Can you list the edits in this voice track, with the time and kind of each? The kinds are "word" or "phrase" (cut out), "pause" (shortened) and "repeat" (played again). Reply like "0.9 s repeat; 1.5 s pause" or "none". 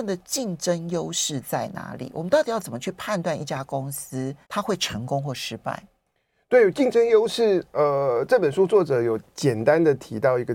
4.4 s pause